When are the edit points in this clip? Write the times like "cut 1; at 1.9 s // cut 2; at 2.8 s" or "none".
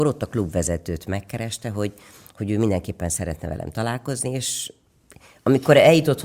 none